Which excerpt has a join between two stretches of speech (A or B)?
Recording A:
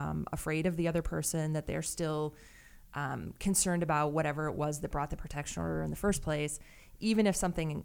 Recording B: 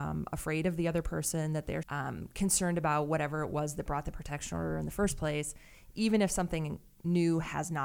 B